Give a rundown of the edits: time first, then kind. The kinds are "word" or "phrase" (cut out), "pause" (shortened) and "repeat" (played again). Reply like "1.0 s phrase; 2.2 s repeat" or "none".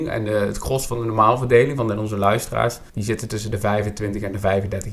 2.9 s pause